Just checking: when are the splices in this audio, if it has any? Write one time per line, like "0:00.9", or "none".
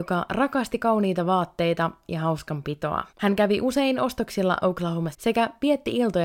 0:02.0
0:03.1
0:05.1

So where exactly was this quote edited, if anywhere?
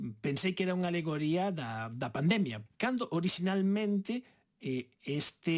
none

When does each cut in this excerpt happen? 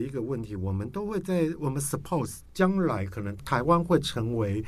none

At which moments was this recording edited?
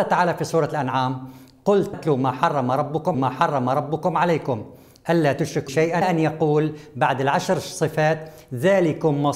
0:01.9
0:03.1
0:05.7
0:06.0

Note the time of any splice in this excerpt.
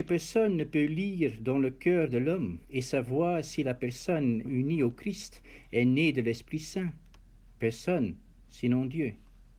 0:02.6
0:04.5

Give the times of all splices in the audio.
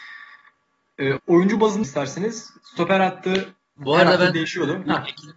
0:01.2
0:01.8

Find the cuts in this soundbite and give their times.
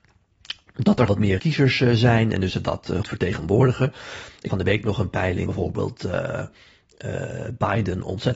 0:01.1
0:01.4
0:02.5
0:03.0
0:04.5
0:05.5

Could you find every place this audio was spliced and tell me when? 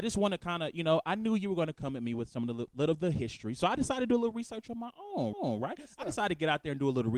0:05.3

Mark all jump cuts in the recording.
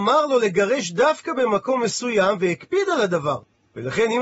none

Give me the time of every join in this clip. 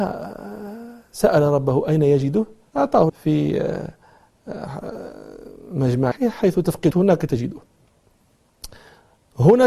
0:02.7
0:03.1
0:06.1
0:06.9

